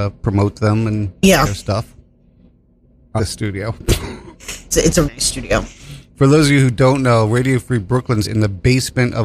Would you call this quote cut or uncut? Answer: cut